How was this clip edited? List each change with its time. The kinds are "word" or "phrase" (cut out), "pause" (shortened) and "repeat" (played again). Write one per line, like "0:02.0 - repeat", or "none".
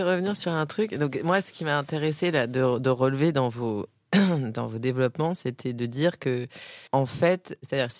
0:06.9 - pause